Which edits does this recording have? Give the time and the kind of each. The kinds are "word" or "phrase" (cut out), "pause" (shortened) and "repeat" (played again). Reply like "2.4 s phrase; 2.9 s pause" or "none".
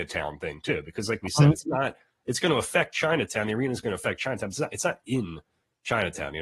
none